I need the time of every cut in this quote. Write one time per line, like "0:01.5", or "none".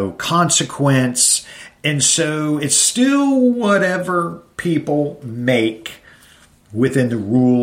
none